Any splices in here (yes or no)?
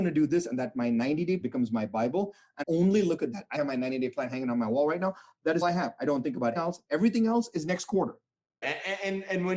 yes